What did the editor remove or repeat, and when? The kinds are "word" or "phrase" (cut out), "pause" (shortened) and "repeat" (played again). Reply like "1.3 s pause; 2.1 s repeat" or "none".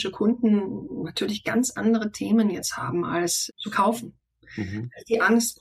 3.5 s word